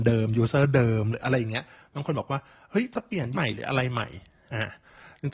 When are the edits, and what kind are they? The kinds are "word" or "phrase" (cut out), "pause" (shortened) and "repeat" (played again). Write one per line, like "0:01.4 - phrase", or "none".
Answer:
0:03.3 - word